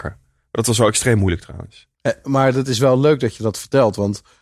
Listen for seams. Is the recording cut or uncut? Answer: uncut